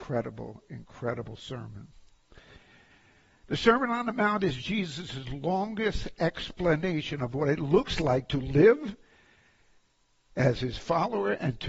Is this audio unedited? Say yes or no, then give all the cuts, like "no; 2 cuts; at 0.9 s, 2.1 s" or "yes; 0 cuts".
yes; 0 cuts